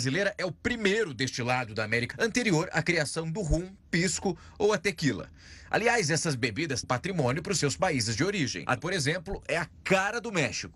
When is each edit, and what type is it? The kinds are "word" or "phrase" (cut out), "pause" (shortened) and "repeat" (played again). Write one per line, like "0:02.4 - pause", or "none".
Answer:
0:02.1 - word
0:06.8 - phrase
0:08.8 - word